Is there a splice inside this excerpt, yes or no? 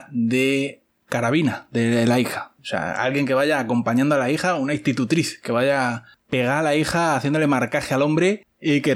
yes